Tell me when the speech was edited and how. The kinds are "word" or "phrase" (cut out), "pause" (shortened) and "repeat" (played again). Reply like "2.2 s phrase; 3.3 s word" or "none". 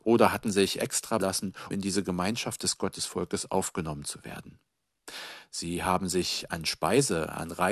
1.2 s word; 1.7 s word